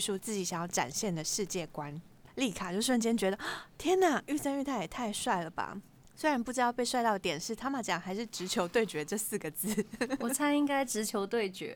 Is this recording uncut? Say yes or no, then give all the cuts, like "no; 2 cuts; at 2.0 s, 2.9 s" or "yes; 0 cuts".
yes; 0 cuts